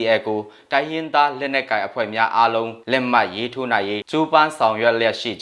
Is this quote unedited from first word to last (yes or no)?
no